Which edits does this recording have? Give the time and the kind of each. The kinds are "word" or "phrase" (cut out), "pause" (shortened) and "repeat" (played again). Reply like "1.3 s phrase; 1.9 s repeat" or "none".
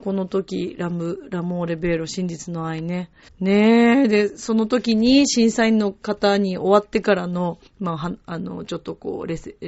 3.3 s pause; 7.7 s pause